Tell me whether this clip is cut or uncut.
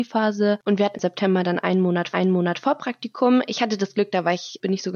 cut